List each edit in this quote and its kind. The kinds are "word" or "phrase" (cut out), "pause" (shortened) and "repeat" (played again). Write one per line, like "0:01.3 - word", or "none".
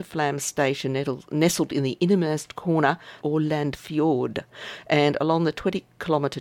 0:03.2 - phrase